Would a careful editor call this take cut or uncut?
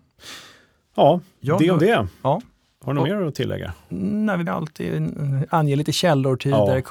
cut